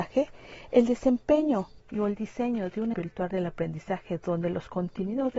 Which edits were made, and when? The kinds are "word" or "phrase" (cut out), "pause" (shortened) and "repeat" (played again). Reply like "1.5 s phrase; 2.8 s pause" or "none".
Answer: 2.9 s word